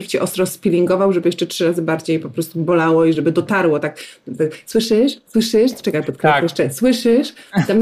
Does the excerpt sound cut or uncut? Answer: uncut